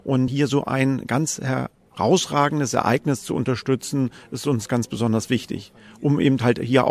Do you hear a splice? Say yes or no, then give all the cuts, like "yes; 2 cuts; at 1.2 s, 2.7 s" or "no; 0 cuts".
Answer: no; 0 cuts